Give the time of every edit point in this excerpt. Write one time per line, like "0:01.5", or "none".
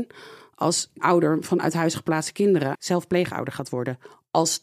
0:01.0
0:02.7